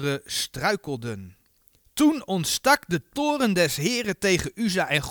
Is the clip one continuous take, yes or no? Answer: yes